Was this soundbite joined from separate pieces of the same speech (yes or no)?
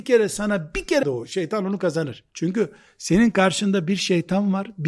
yes